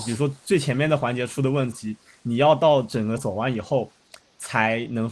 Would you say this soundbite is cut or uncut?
cut